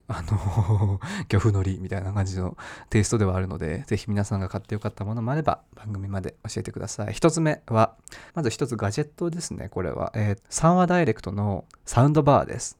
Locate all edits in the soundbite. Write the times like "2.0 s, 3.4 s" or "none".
8.3 s, 10.4 s